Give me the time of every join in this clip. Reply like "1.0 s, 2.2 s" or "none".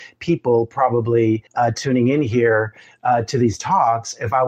1.5 s

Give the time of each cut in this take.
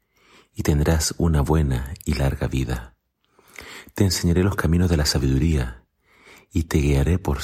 none

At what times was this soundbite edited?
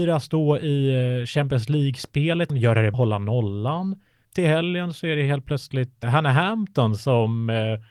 2.5 s, 2.9 s, 6.0 s

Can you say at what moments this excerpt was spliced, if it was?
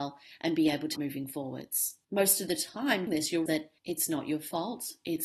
0.9 s, 2.0 s, 3.1 s, 3.5 s, 3.8 s

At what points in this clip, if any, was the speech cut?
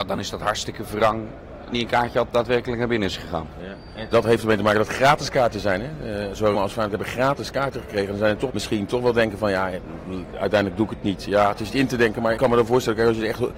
1.7 s, 4.1 s, 6.5 s, 8.5 s, 11.7 s, 12.4 s

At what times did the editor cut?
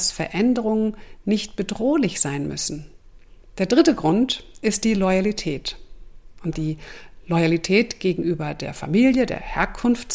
6.5 s

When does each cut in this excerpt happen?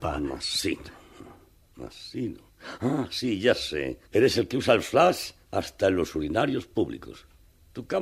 4.0 s, 5.4 s

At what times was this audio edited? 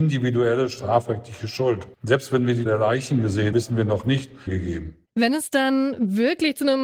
1.9 s, 2.7 s, 3.5 s, 4.5 s, 5.1 s

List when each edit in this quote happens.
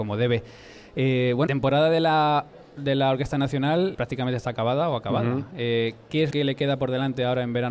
1.5 s, 3.9 s, 6.3 s

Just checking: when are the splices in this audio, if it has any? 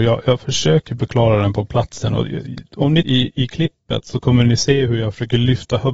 3.0 s

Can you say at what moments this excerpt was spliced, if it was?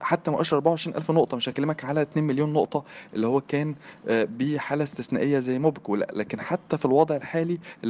none

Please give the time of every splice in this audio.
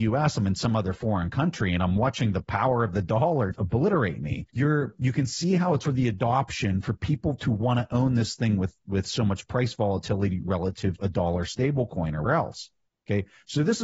3.5 s, 4.5 s, 5.8 s, 11.0 s, 12.3 s

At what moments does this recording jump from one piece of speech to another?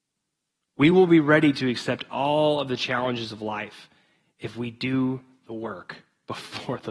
none

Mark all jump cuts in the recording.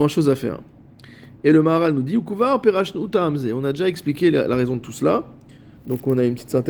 none

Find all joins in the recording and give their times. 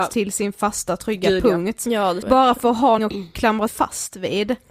2.2 s, 3.0 s, 3.7 s

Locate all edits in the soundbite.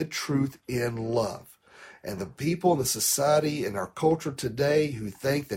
none

